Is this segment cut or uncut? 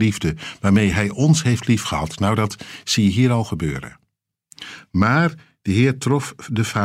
uncut